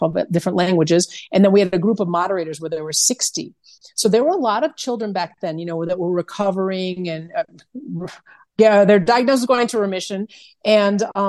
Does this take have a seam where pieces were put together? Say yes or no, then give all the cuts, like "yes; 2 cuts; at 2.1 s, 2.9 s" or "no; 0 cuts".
no; 0 cuts